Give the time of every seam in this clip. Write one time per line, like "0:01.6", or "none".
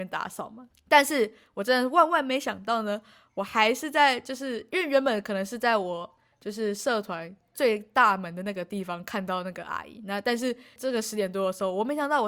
none